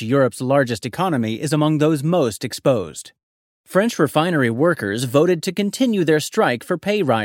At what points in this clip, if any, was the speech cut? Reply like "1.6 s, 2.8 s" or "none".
3.5 s